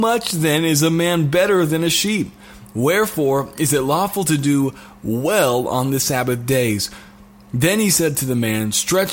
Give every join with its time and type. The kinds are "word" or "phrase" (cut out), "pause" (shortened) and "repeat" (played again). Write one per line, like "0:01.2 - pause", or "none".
none

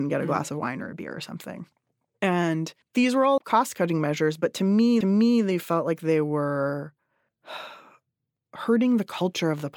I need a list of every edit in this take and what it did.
0:02.8 - pause
0:03.4 - word
0:05.0 - repeat

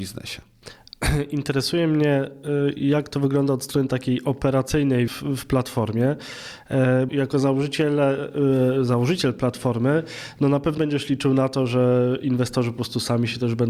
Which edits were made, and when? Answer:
0:05.1 - word
0:07.1 - word
0:10.8 - word

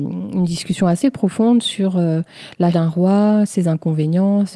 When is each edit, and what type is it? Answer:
0:02.7 - word

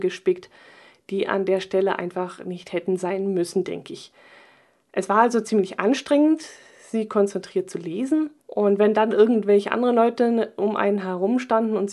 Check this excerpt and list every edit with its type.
0:08.4 - pause

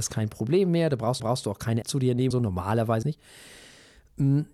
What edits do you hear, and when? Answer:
0:01.2 - repeat
0:01.8 - word
0:02.3 - word
0:03.0 - word

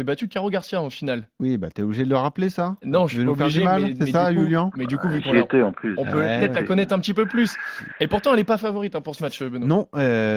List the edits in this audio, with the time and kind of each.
none

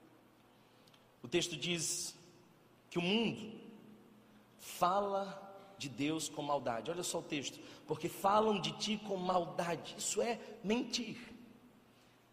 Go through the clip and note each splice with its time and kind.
none

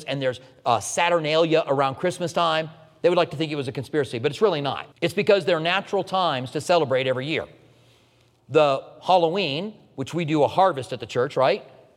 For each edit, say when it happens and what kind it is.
0:04.9 - pause

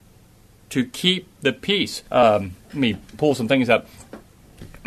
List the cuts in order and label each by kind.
0:02.1 - pause

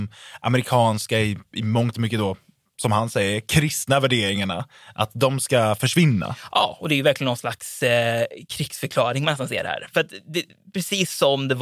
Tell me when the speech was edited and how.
none

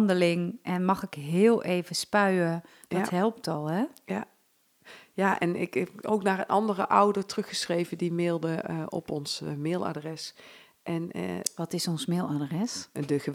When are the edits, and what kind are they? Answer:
none

